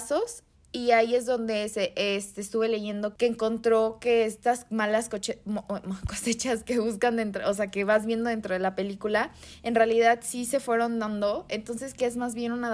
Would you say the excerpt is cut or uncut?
uncut